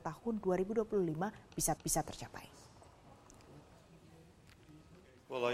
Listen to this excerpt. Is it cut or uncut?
cut